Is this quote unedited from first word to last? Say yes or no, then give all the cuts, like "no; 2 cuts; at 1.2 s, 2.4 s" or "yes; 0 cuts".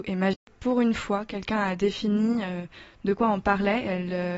yes; 0 cuts